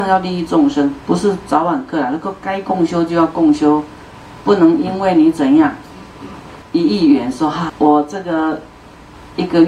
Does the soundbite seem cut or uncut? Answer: cut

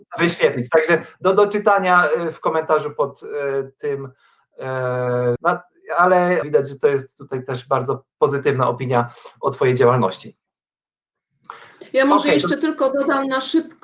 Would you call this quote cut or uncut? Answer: cut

